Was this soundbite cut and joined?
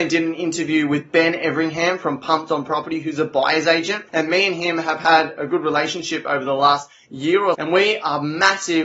yes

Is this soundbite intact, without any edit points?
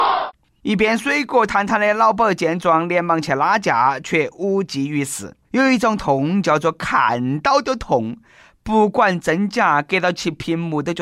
no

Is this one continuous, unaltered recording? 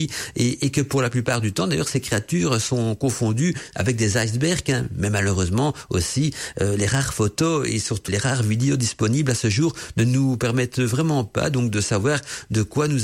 no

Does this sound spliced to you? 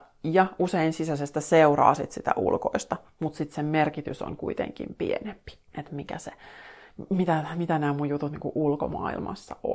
yes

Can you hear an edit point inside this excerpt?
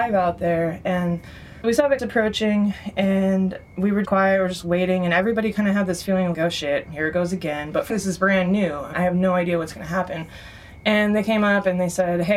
yes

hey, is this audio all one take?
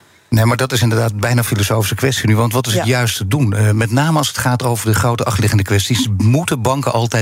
yes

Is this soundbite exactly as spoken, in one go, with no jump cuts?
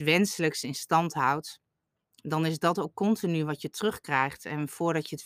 yes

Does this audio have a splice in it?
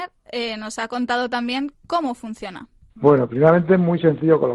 no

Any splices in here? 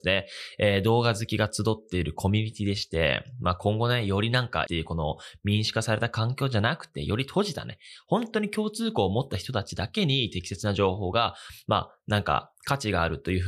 yes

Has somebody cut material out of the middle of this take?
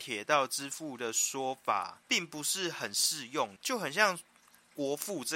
yes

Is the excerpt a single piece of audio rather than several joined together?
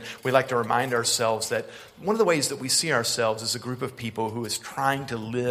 yes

